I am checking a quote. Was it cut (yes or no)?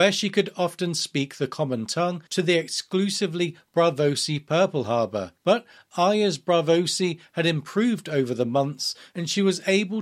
yes